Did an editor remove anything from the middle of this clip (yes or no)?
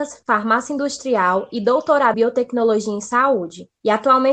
yes